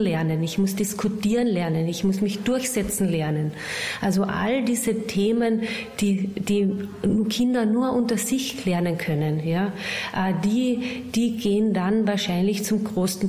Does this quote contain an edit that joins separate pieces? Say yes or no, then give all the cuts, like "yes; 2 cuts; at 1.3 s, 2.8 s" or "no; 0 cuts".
no; 0 cuts